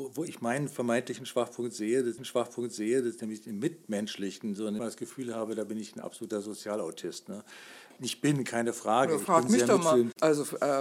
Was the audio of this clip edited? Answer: yes; 3 cuts; at 2.2 s, 4.8 s, 8.0 s

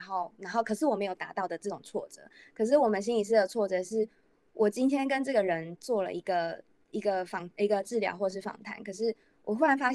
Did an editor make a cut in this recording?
no; 0 cuts

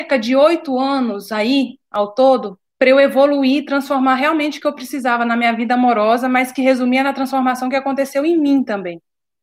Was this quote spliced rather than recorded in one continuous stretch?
yes; 1 cut; at 2.7 s

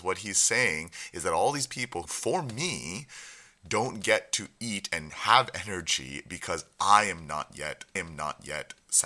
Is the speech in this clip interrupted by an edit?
yes; 2 cuts; at 2.1 s, 8.0 s

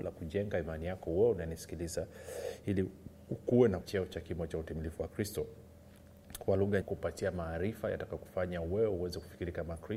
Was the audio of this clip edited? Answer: yes; 2 cuts; at 3.8 s, 6.8 s

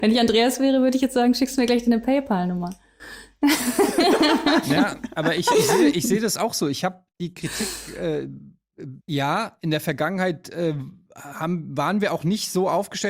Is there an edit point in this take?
yes; 1 cut; at 9.0 s

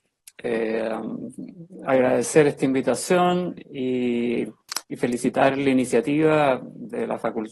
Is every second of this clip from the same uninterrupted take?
yes; 0 cuts

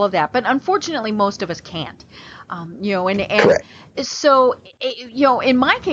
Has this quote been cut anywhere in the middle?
no; 0 cuts

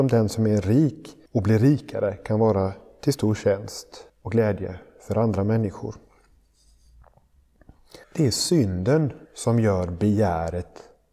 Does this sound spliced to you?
yes; 4 cuts; at 1.3 s, 4.1 s, 8.0 s, 9.3 s

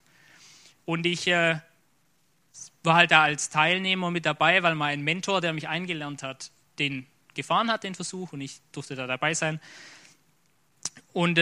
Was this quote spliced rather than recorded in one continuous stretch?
no; 0 cuts

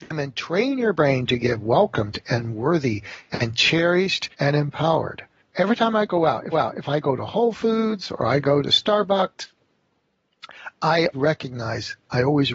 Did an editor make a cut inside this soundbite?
yes; 4 cuts; at 4.3 s, 5.4 s, 6.5 s, 11.1 s

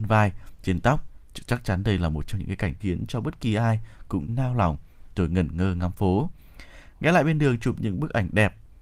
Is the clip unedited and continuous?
no; 3 cuts; at 1.2 s, 2.8 s, 4.3 s

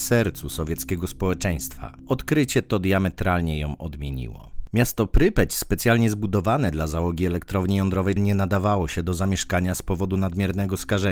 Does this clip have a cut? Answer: yes; 1 cut; at 8.2 s

